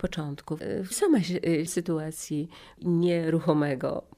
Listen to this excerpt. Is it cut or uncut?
cut